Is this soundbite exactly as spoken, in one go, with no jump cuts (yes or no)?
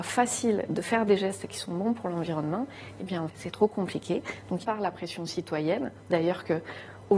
no